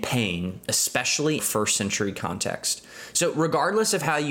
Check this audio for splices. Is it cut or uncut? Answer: cut